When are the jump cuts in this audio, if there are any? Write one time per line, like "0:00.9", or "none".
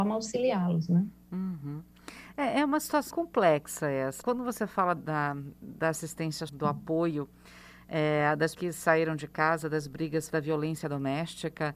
0:03.1
0:04.2
0:05.0
0:06.5
0:08.5
0:10.3